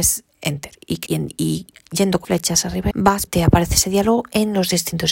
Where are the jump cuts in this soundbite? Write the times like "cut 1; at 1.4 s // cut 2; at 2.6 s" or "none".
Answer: cut 1; at 1.1 s // cut 2; at 2.2 s // cut 3; at 2.9 s // cut 4; at 3.3 s